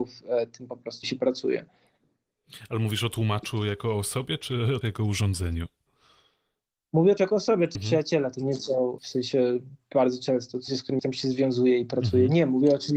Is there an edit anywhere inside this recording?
yes; 7 cuts; at 1.0 s, 4.8 s, 7.2 s, 7.8 s, 9.0 s, 10.7 s, 11.0 s

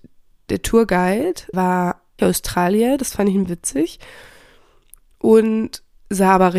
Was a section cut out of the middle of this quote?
yes; 3 cuts; at 1.5 s, 2.2 s, 3.5 s

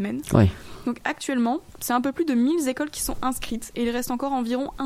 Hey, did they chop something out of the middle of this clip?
no; 0 cuts

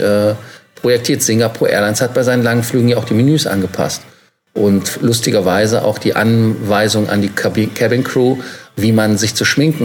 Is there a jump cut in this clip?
no; 0 cuts

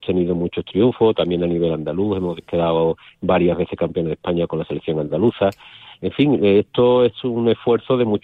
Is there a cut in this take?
no; 0 cuts

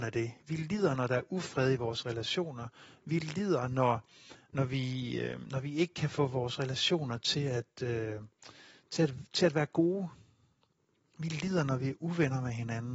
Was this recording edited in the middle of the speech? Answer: no; 0 cuts

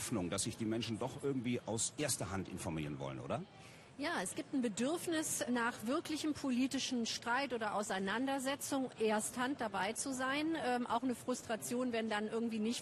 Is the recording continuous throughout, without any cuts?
no; 1 cut; at 5.5 s

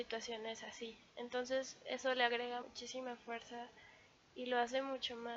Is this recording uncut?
no; 1 cut; at 2.6 s

